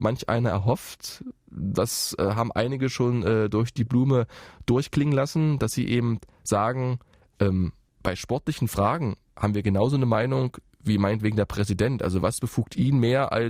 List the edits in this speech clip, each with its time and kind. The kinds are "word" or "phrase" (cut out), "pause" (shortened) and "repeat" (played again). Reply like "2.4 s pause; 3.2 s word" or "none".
6.3 s pause